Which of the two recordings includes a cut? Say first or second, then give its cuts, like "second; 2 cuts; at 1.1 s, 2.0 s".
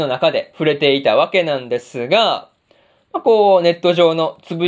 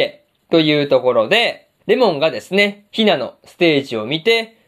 second; 1 cut; at 1.8 s